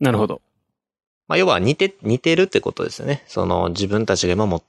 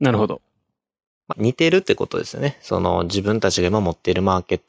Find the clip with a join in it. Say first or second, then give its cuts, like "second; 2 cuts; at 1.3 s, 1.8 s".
second; 1 cut; at 1.3 s